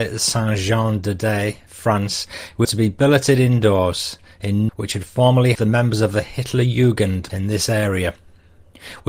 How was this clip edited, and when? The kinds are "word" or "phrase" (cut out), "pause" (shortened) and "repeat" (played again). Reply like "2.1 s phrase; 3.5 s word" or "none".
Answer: 2.6 s word; 4.7 s phrase; 5.5 s word; 7.3 s word